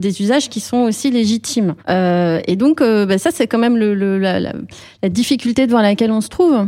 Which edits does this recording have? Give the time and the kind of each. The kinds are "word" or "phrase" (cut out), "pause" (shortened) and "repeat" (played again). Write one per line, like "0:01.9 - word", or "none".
0:01.8 - pause

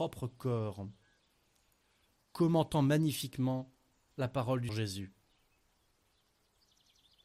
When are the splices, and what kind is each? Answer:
0:04.7 - word

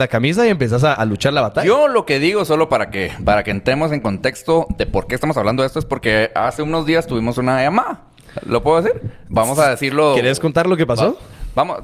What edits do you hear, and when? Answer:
0:01.0 - word

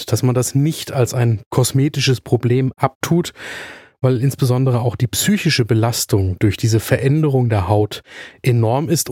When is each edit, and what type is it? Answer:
none

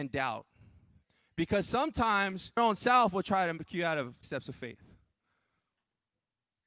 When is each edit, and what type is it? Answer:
0:02.6 - word
0:03.7 - word
0:04.2 - word

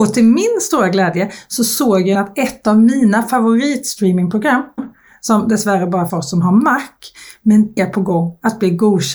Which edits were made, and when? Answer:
0:02.1 - word
0:04.8 - word
0:06.1 - word
0:07.8 - word

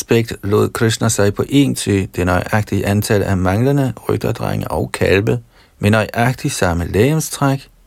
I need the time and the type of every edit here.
0:01.7 - phrase
0:05.6 - pause

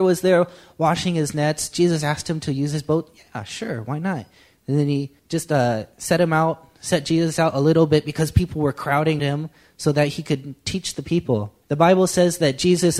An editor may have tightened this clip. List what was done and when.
0:05.2 - pause
0:09.2 - word
0:11.6 - pause

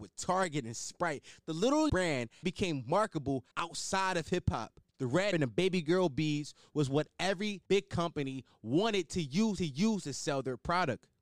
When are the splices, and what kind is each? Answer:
0:01.9 - word
0:02.4 - word
0:03.5 - pause
0:04.9 - pause
0:05.3 - word
0:07.7 - pause
0:09.6 - repeat

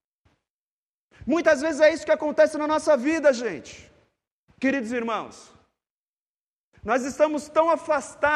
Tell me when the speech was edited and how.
none

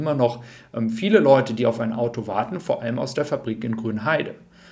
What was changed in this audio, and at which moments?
none

